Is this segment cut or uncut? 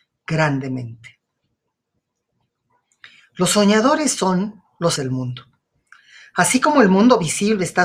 cut